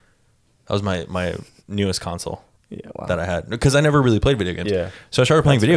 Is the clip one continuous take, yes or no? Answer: yes